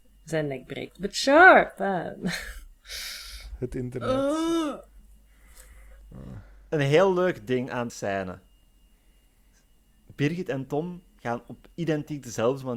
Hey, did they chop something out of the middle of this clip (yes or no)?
yes